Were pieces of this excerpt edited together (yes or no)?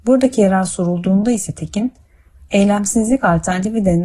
no